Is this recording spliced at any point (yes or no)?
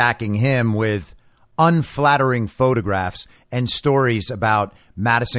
no